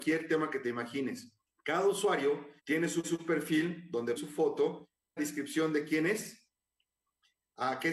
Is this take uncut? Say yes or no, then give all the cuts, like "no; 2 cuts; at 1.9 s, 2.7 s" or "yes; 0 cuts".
no; 5 cuts; at 1.5 s, 2.6 s, 3.0 s, 4.2 s, 5.2 s